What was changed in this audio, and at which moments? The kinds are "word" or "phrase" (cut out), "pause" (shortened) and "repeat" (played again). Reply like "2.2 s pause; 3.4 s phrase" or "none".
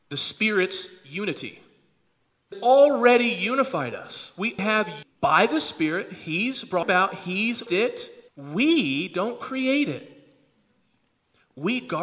2.5 s phrase; 4.6 s word; 5.0 s word; 6.8 s word; 7.7 s word; 8.3 s pause